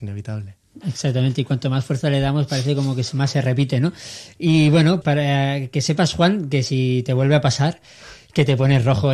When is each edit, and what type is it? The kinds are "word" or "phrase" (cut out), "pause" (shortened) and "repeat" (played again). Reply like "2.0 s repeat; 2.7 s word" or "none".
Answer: 5.0 s word